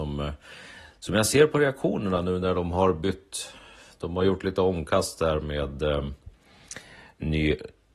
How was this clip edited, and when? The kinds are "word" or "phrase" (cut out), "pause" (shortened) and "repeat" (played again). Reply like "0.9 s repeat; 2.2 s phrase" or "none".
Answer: none

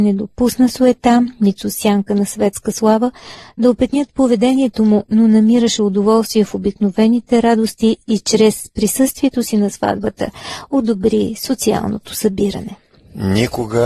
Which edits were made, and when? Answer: none

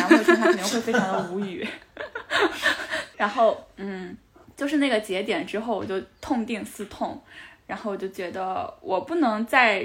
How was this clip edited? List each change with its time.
3.1 s word; 4.4 s pause

